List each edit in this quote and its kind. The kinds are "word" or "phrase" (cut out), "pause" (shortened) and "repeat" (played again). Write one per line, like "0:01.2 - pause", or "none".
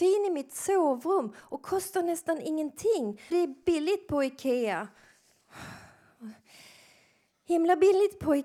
0:03.3 - word